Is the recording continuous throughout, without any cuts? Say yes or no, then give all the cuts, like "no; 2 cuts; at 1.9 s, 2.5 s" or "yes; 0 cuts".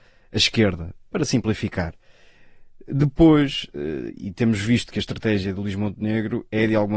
yes; 0 cuts